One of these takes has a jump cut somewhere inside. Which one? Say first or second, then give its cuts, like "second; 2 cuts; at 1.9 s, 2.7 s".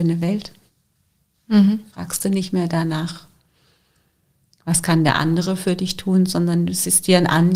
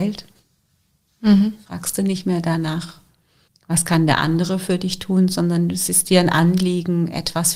second; 1 cut; at 3.5 s